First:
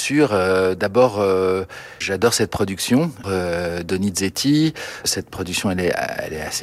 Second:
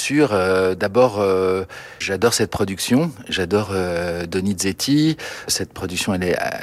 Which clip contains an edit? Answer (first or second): first